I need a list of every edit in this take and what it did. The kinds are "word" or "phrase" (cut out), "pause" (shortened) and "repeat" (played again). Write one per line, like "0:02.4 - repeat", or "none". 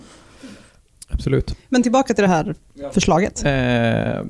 none